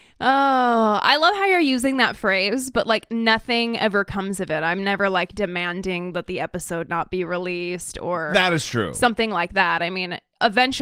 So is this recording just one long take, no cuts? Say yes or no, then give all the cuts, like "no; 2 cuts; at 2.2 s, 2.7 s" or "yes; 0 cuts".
yes; 0 cuts